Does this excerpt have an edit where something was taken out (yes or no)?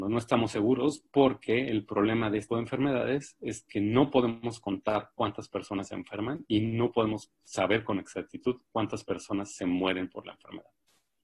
yes